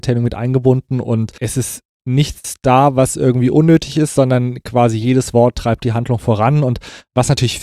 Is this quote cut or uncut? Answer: uncut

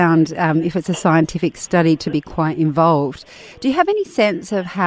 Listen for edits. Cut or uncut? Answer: uncut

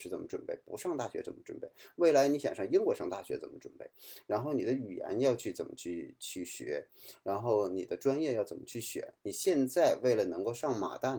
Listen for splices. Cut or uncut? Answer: uncut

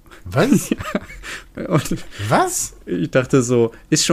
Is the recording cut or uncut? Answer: uncut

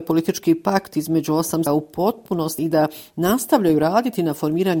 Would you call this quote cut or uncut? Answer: cut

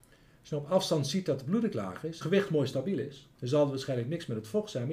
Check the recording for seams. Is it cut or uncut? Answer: cut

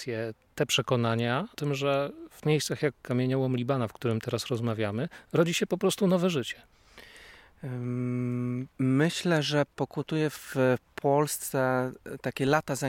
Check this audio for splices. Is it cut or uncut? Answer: cut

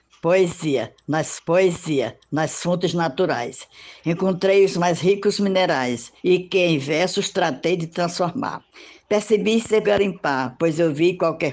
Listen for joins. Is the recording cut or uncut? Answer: cut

